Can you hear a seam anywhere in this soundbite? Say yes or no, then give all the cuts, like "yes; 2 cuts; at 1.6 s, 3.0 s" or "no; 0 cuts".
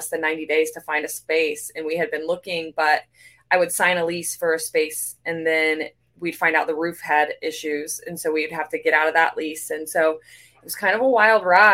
no; 0 cuts